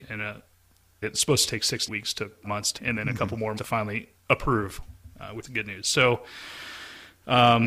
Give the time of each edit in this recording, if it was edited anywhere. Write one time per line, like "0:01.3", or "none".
0:01.0
0:01.9
0:02.4
0:02.8
0:03.6
0:05.4